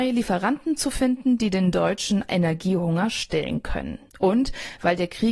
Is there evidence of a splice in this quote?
no; 0 cuts

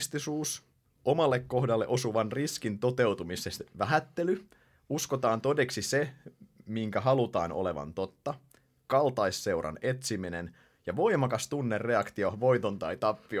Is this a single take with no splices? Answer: yes; 0 cuts

